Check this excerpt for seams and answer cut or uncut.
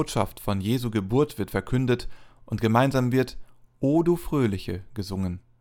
uncut